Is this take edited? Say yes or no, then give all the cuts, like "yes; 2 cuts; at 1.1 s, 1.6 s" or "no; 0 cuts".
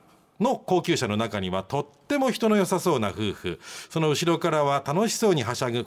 no; 0 cuts